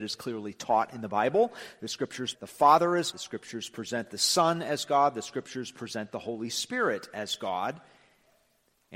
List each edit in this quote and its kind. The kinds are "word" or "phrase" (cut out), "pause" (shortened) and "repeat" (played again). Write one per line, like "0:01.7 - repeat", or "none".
0:02.3 - word
0:03.1 - word

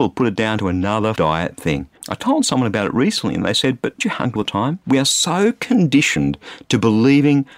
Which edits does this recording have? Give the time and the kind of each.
0:01.2 - word
0:02.0 - pause
0:04.0 - phrase
0:04.4 - word
0:04.8 - pause

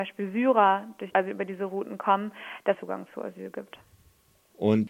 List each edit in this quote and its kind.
0:01.1 - word
0:02.7 - phrase

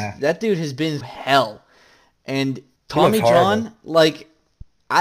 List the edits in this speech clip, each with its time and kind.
0:01.0 - word
0:02.8 - pause

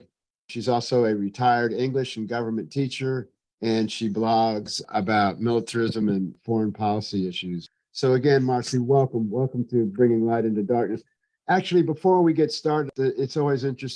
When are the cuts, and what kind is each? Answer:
none

